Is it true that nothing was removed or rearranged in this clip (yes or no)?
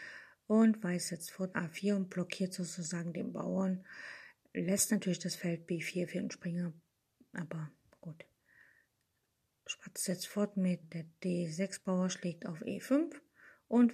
no